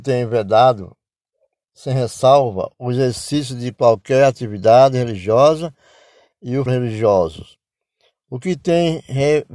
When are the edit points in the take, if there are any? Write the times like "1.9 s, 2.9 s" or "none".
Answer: 6.7 s